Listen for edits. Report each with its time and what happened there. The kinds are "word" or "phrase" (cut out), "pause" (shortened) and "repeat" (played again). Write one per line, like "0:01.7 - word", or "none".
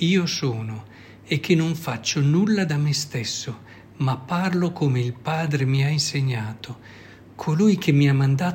none

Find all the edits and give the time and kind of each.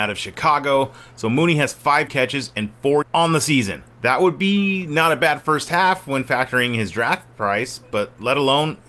0:02.1 - phrase
0:03.0 - word
0:03.9 - pause

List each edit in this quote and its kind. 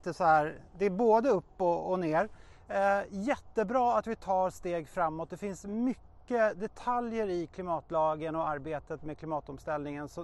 none

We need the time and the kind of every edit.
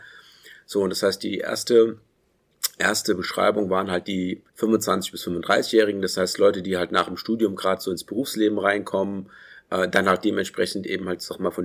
0:04.5 - pause

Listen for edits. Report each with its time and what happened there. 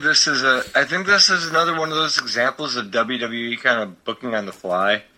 none

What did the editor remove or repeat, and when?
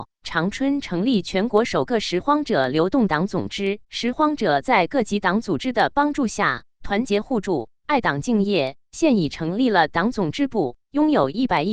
0:03.8 - pause

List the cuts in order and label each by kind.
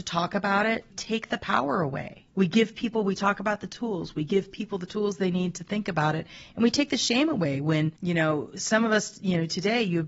0:00.9 - word
0:02.3 - pause
0:08.0 - pause

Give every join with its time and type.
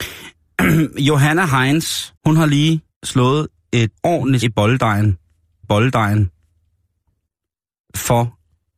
0:02.2 - pause
0:02.9 - pause
0:04.0 - word
0:04.4 - word
0:05.6 - repeat

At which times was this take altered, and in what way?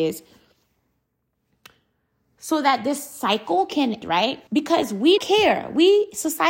0:04.0 - word
0:04.5 - pause
0:05.2 - word

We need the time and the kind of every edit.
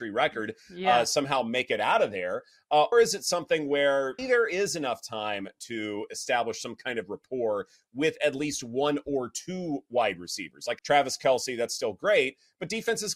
0:02.9 - word
0:04.2 - word
0:10.8 - word

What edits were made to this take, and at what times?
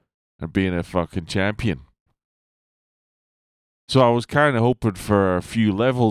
none

